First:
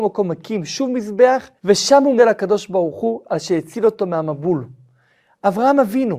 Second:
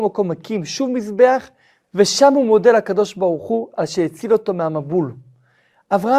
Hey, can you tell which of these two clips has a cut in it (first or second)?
first